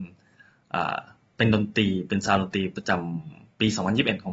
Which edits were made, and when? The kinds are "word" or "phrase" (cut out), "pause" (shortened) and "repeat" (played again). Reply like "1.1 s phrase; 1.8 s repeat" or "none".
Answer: none